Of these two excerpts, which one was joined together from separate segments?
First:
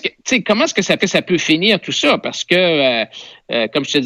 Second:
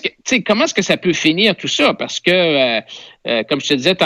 first; 1 cut; at 1.0 s

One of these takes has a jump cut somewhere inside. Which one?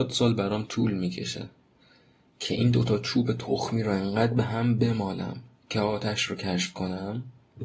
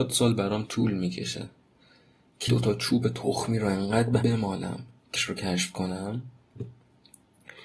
second; 3 cuts; at 2.5 s, 4.2 s, 5.2 s

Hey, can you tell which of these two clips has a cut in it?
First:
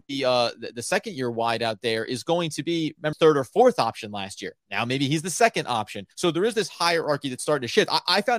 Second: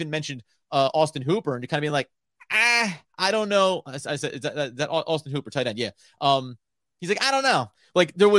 first; 3 cuts; at 3.1 s, 4.6 s, 6.1 s

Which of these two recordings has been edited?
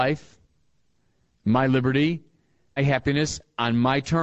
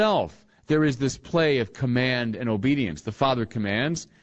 first; 1 cut; at 2.8 s

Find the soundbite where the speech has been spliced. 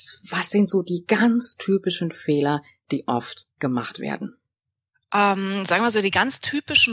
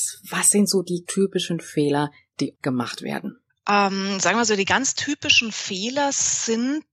second; 3 cuts; at 1.0 s, 2.5 s, 3.5 s

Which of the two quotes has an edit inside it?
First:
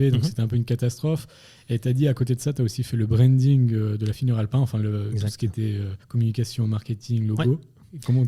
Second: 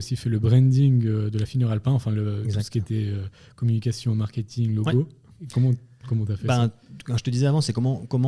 first; 1 cut; at 6.0 s

